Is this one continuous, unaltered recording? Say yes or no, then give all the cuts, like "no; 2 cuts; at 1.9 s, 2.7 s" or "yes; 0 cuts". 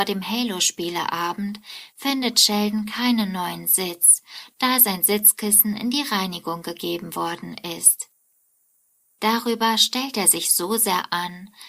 yes; 0 cuts